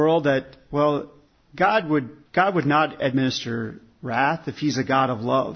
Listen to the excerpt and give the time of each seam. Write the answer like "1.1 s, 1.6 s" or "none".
1.3 s, 2.3 s